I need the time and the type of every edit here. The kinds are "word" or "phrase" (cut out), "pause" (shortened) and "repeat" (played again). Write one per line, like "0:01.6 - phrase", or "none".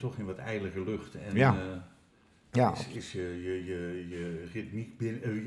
none